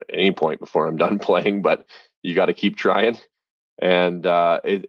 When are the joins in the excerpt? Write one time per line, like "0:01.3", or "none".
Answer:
none